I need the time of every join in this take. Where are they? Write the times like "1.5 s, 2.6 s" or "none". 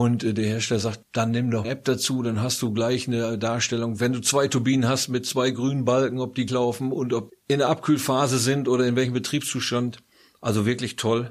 1.0 s, 1.6 s, 6.5 s, 7.3 s